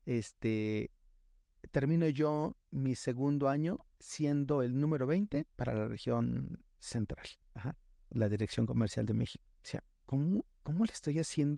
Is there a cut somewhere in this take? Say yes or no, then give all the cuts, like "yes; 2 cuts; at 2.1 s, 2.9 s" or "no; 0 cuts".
yes; 3 cuts; at 5.5 s, 7.4 s, 9.5 s